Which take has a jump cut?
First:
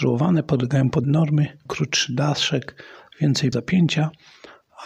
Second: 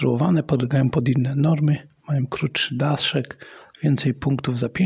first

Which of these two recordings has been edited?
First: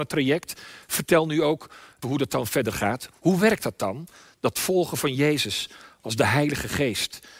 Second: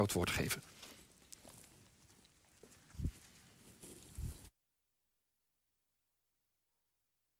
first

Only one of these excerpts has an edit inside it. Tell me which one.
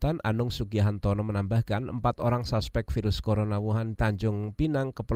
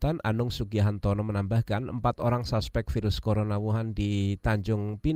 first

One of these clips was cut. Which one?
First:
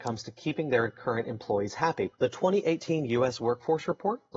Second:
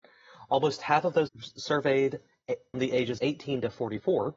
second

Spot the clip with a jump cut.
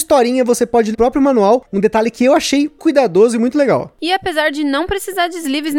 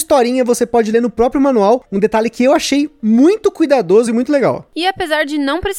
first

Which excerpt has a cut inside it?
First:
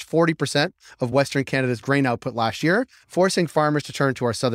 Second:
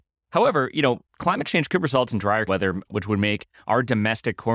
second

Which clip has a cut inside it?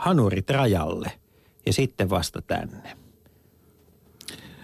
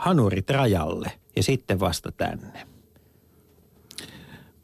second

